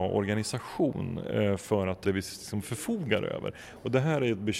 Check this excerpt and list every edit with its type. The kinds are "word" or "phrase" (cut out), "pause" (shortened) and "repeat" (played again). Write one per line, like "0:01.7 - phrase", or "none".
0:02.0 - phrase